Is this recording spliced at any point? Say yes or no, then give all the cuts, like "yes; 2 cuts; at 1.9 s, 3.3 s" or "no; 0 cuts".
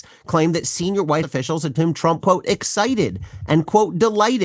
yes; 3 cuts; at 1.2 s, 1.7 s, 2.2 s